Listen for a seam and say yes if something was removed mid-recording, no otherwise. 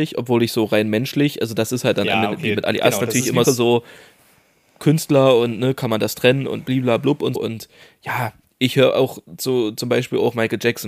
yes